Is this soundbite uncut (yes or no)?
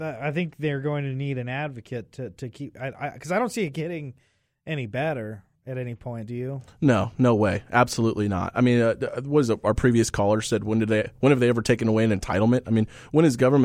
yes